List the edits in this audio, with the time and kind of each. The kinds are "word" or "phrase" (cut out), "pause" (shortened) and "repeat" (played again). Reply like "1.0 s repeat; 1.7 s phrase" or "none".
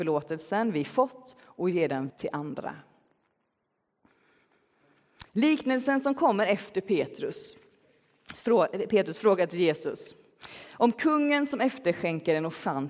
2.1 s word; 5.3 s pause